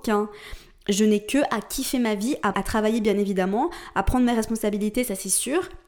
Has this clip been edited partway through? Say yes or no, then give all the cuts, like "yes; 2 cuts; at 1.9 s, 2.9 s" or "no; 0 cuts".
yes; 1 cut; at 2.5 s